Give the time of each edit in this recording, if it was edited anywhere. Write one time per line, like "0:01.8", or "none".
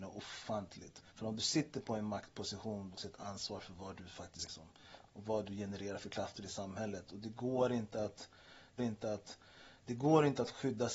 0:01.1
0:02.9
0:04.4
0:08.8